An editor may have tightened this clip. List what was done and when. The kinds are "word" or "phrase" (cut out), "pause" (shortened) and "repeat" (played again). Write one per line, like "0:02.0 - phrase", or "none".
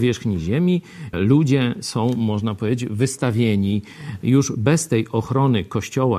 0:01.1 - word